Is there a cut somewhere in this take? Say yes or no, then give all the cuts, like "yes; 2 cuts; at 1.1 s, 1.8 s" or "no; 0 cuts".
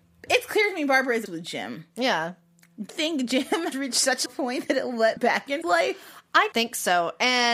yes; 7 cuts; at 1.3 s, 2.9 s, 3.7 s, 4.3 s, 5.2 s, 5.6 s, 6.5 s